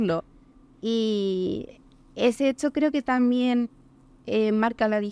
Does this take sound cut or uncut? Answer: uncut